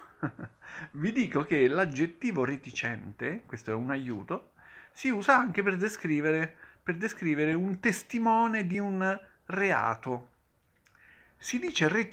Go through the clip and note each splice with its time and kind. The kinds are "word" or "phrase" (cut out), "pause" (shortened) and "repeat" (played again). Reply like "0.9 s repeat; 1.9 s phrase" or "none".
none